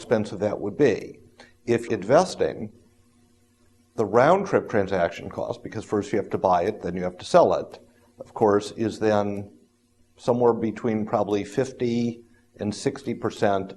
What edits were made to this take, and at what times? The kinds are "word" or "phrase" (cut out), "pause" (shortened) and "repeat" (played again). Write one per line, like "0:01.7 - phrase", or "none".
0:01.9 - word